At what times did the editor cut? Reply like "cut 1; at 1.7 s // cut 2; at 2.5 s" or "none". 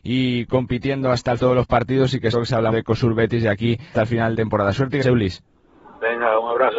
cut 1; at 1.4 s // cut 2; at 2.3 s // cut 3; at 2.7 s // cut 4; at 3.9 s // cut 5; at 4.4 s // cut 6; at 5.0 s